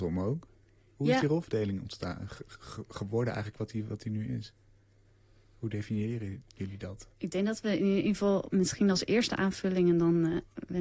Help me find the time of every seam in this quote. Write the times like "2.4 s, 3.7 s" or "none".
none